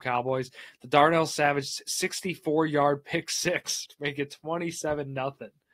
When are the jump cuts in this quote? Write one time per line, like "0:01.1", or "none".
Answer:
0:03.9